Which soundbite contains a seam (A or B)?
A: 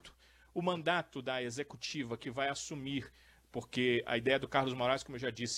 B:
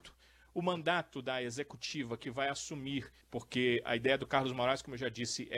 B